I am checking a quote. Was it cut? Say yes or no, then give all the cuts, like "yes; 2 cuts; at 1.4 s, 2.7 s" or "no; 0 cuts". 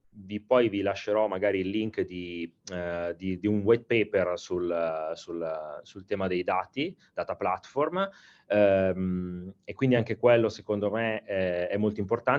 no; 0 cuts